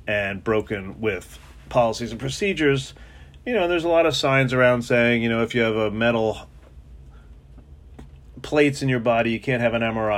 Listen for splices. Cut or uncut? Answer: uncut